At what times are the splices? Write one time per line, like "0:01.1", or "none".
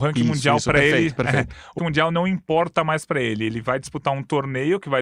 0:01.8